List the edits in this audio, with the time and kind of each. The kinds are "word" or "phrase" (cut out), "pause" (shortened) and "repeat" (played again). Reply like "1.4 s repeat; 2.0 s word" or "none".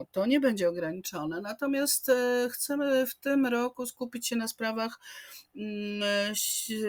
none